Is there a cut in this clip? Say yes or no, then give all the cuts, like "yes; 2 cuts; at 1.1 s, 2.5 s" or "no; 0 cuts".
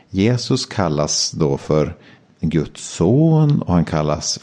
no; 0 cuts